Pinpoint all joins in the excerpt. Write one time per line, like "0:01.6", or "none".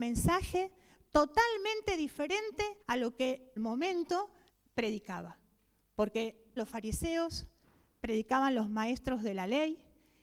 0:02.8
0:03.6
0:04.5
0:06.6